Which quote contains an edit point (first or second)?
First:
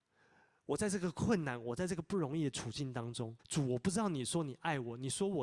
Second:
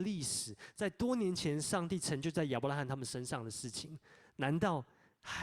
first